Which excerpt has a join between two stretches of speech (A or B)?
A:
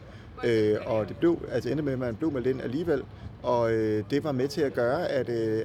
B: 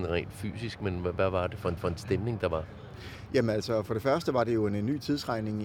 B